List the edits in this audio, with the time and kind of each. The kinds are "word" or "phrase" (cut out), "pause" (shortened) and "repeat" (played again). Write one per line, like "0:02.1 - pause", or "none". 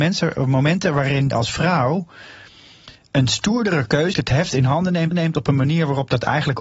0:01.3 - word
0:04.1 - word
0:05.1 - repeat